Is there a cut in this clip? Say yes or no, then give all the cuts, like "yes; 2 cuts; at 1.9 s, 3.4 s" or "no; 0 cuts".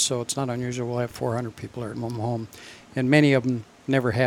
yes; 2 cuts; at 1.1 s, 1.9 s